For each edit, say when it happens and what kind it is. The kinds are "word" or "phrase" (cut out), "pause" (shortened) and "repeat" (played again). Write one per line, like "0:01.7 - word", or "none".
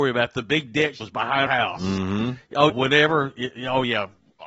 0:01.0 - word
0:01.5 - word
0:02.7 - word